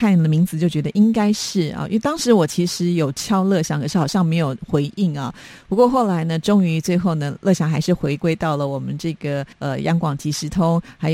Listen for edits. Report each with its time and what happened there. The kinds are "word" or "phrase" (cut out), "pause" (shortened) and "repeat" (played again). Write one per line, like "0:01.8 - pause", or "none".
0:09.5 - pause